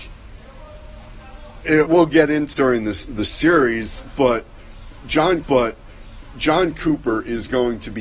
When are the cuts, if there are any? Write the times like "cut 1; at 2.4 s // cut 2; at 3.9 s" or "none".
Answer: cut 1; at 1.9 s // cut 2; at 2.5 s // cut 3; at 5.4 s